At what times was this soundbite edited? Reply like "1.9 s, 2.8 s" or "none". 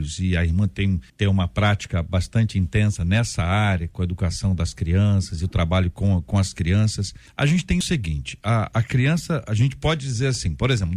1.1 s, 7.3 s